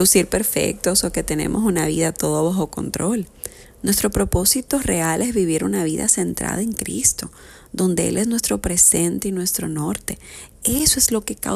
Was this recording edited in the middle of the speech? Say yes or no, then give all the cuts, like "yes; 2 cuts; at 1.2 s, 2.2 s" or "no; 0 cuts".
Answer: no; 0 cuts